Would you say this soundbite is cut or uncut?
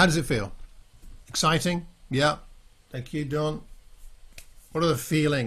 uncut